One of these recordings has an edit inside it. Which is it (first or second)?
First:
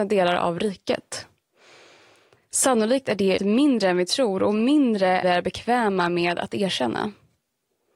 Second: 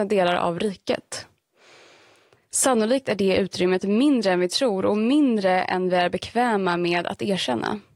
first